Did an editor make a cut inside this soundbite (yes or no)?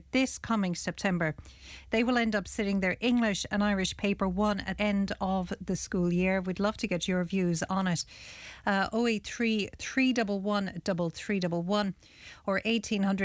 yes